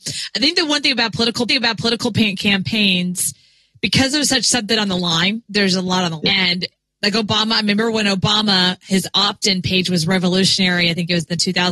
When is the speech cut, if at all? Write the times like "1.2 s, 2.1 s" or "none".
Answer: 1.5 s, 5.4 s, 6.2 s

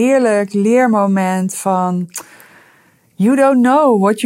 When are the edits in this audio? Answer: none

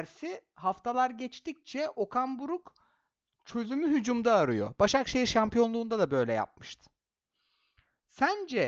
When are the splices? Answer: none

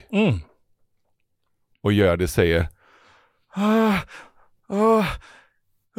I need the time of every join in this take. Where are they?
none

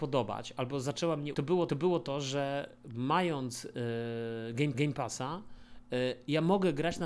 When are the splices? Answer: 1.3 s, 1.7 s, 4.7 s

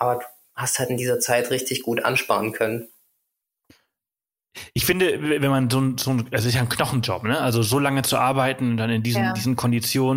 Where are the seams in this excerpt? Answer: none

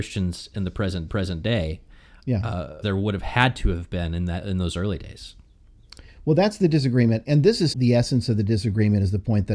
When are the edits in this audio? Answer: 1.1 s, 2.8 s, 7.7 s

